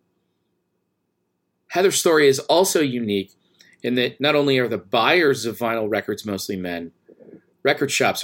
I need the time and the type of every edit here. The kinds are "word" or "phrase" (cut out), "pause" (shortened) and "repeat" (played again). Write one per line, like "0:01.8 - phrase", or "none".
none